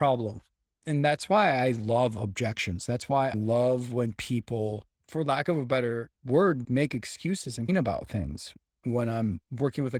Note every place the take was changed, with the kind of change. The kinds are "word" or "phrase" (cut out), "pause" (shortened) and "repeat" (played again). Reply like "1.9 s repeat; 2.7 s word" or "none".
3.3 s word; 6.6 s word; 7.7 s word